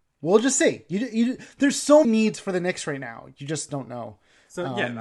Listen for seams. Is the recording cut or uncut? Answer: cut